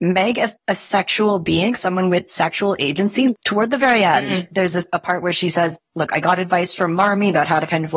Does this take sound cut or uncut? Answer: uncut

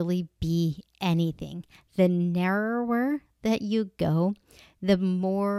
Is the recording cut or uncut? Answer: uncut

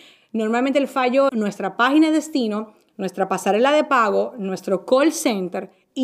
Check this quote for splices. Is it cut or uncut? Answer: cut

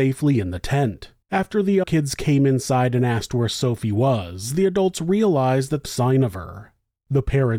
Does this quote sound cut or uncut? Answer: cut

